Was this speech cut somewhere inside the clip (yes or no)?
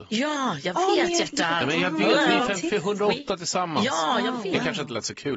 no